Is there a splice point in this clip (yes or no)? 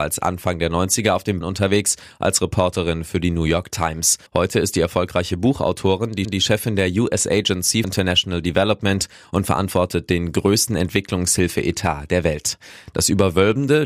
yes